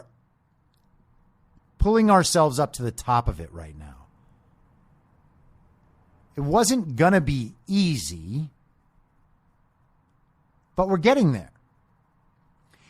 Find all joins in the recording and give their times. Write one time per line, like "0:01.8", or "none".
none